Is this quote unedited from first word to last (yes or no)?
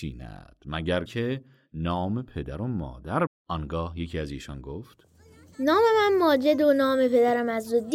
no